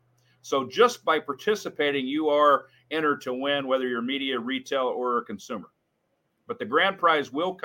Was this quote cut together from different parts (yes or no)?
no